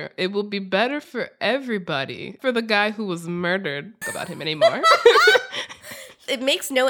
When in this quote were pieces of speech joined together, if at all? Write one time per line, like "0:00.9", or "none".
0:02.4
0:04.0